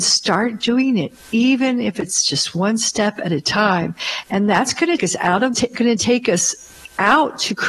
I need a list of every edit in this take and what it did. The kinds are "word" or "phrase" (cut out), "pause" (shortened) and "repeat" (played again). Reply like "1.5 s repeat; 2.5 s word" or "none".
5.0 s word; 5.5 s phrase